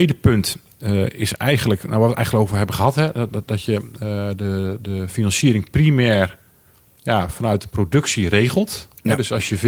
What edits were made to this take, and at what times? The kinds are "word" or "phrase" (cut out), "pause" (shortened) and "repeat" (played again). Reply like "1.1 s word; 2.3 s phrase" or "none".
none